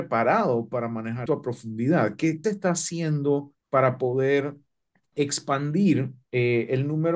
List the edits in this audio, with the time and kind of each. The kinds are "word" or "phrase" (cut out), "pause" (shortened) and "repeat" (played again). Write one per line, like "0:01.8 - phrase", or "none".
0:01.3 - word
0:02.4 - phrase
0:03.6 - pause
0:04.9 - pause